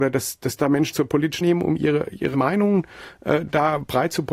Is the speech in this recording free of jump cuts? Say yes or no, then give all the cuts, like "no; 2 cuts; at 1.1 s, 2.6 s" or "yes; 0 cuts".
no; 3 cuts; at 0.9 s, 1.4 s, 2.3 s